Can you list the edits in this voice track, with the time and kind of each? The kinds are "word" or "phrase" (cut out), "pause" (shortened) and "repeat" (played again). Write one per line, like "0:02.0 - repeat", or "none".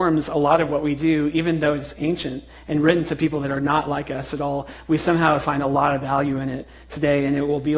0:05.4 - word